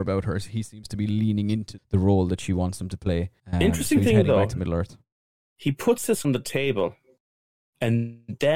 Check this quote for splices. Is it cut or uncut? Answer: cut